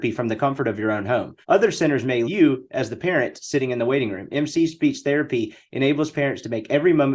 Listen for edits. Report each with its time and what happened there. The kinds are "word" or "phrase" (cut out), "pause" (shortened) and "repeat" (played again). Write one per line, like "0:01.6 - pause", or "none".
0:01.4 - pause
0:02.2 - word

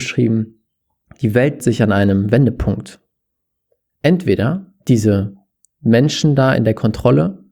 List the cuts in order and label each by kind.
0:01.6 - word

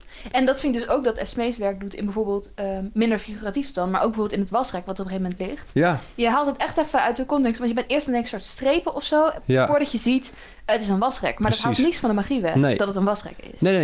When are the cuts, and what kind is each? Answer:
none

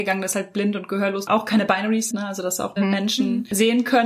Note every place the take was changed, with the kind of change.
0:02.1 - word
0:02.8 - word

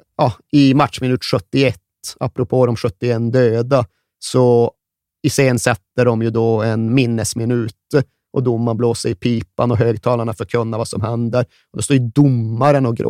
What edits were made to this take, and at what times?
none

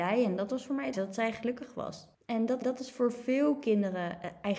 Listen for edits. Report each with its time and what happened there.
0:00.9 - word
0:02.1 - pause
0:02.6 - repeat

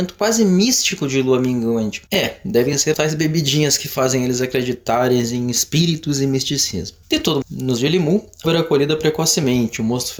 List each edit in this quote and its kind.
0:02.1 - pause
0:02.9 - word
0:07.0 - pause
0:07.4 - word
0:07.8 - word
0:08.4 - word

